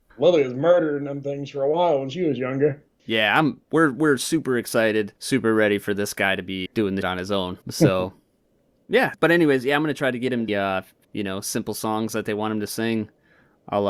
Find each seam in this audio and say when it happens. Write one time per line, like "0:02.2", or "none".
0:05.2
0:06.7
0:07.0
0:07.6
0:09.1
0:10.5
0:11.0